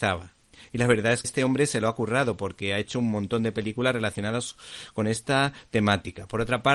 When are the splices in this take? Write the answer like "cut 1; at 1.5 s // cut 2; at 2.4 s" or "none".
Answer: cut 1; at 1.2 s